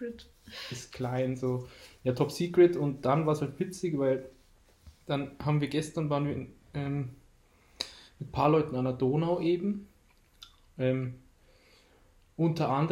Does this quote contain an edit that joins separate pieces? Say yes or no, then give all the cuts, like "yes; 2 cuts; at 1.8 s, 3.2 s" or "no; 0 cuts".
no; 0 cuts